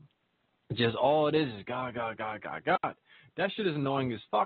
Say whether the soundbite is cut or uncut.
uncut